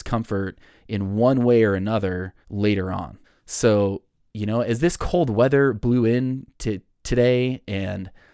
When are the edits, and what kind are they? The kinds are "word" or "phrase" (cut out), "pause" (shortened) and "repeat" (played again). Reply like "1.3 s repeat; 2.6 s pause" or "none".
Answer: 2.4 s pause; 3.2 s pause